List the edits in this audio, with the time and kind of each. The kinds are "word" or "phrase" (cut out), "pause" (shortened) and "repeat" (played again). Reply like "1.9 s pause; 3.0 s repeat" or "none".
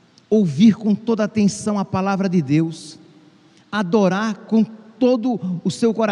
none